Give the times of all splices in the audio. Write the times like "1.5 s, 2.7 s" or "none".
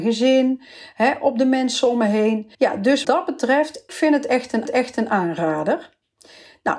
2.5 s, 3.0 s, 3.9 s, 4.7 s